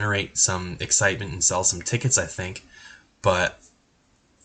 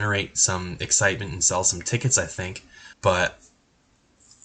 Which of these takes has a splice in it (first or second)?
second